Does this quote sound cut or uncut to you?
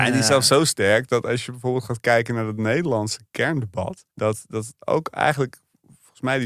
cut